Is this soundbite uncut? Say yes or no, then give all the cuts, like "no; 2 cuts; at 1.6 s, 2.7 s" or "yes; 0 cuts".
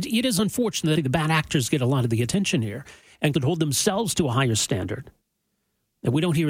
no; 2 cuts; at 1.0 s, 3.3 s